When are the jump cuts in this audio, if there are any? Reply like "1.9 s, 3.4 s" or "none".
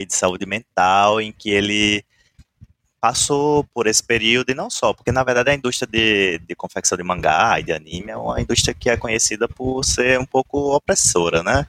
none